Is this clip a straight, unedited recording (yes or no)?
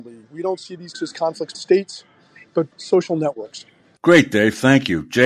no